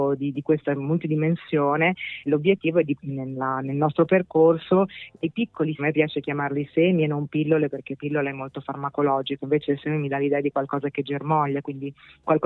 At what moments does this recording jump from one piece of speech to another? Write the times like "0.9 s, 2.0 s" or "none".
2.3 s, 3.0 s, 5.8 s